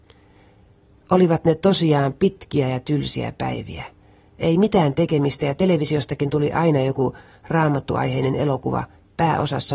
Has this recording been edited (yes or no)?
no